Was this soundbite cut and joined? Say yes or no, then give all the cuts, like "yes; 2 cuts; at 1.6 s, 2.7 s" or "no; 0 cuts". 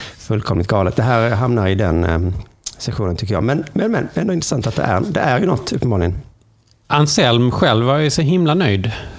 no; 0 cuts